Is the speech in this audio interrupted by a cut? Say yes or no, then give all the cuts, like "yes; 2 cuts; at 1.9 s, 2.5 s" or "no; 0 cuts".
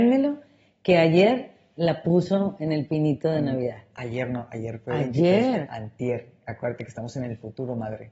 no; 0 cuts